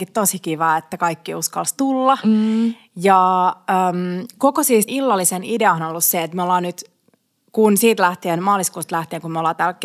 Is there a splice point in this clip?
yes; 1 cut; at 4.9 s

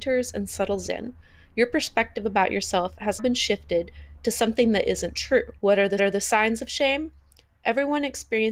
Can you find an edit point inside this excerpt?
yes; 3 cuts; at 3.2 s, 5.6 s, 6.0 s

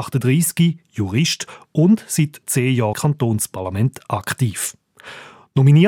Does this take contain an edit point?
yes; 2 cuts; at 2.4 s, 2.9 s

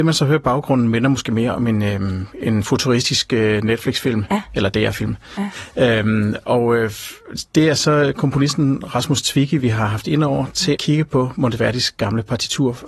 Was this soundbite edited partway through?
yes; 1 cut; at 10.8 s

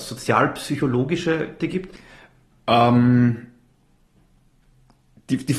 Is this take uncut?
no; 1 cut; at 1.6 s

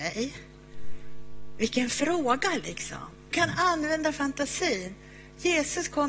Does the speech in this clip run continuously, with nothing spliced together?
no; 1 cut; at 3.3 s

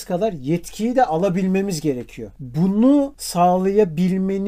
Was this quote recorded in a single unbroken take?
yes; 0 cuts

